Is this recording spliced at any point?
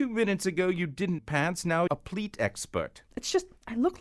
yes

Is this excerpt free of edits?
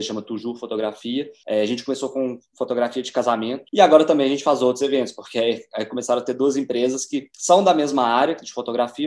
yes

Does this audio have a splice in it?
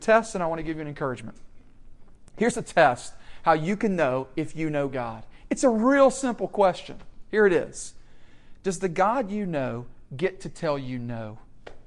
no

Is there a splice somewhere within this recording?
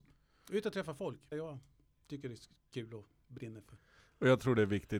yes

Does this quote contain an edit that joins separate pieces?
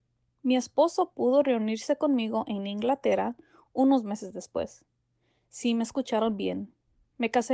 no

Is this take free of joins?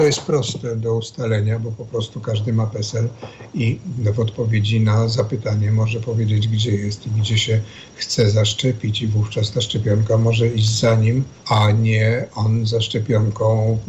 no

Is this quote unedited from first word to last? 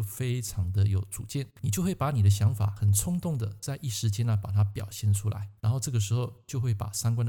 no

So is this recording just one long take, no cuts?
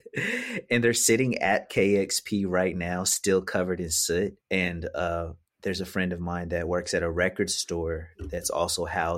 no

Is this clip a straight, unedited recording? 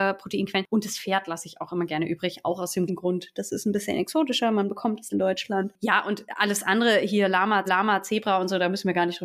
no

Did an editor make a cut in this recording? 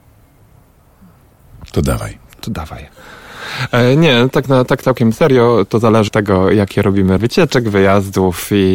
yes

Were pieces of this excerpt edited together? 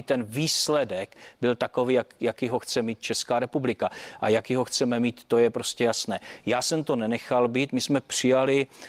no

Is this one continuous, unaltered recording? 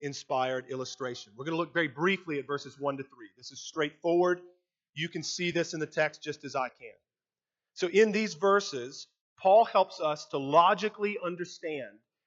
yes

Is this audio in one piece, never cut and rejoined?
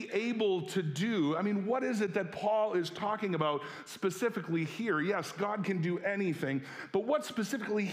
yes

